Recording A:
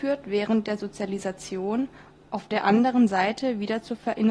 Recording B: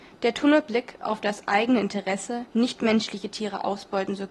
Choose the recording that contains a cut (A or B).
B